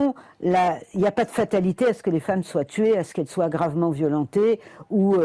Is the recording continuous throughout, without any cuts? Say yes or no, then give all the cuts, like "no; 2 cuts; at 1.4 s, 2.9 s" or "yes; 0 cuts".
yes; 0 cuts